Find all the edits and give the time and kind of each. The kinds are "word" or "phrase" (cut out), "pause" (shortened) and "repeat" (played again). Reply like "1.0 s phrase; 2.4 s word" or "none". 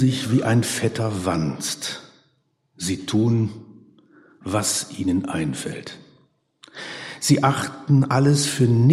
none